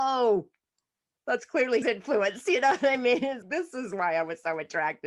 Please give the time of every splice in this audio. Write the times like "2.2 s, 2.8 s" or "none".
1.8 s, 3.4 s